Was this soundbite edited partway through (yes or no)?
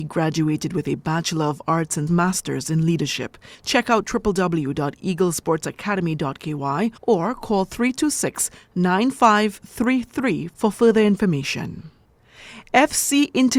yes